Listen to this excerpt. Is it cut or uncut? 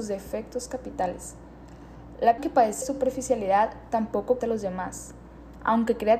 cut